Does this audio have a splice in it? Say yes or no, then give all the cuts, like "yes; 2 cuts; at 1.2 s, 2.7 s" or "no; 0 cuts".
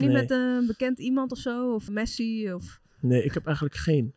yes; 1 cut; at 1.9 s